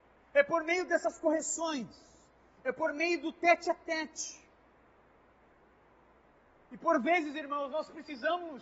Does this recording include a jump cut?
no; 0 cuts

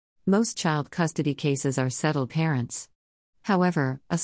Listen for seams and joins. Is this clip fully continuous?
no; 1 cut; at 2.3 s

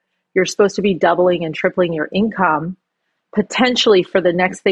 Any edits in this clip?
no; 0 cuts

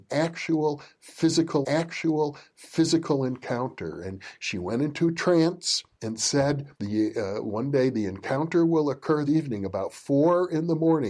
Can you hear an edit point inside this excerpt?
yes; 4 cuts; at 1.6 s, 5.9 s, 6.7 s, 9.3 s

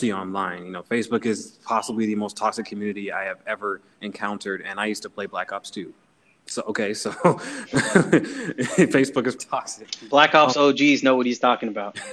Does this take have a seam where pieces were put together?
yes; 1 cut; at 9.4 s

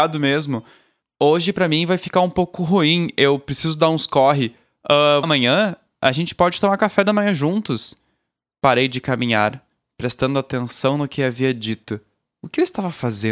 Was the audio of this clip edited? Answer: yes; 1 cut; at 5.2 s

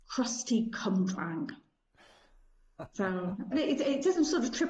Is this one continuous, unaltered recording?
no; 1 cut; at 3.5 s

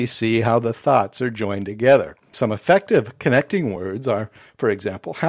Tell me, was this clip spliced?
no; 0 cuts

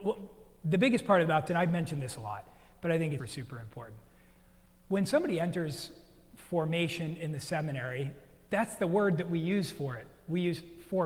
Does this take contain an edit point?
yes; 2 cuts; at 1.5 s, 3.2 s

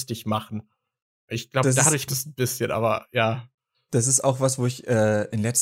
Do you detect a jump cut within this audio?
yes; 1 cut; at 2.1 s

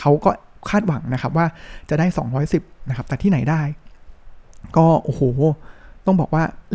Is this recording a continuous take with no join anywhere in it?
yes; 0 cuts

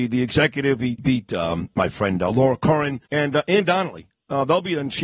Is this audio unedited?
no; 2 cuts; at 1.0 s, 3.1 s

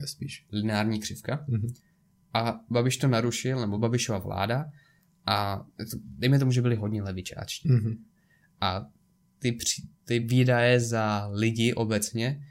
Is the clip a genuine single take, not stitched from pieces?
yes; 0 cuts

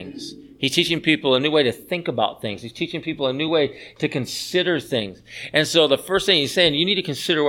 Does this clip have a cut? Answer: no; 0 cuts

